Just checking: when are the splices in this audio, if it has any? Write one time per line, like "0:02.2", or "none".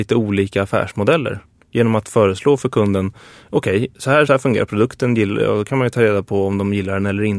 0:04.3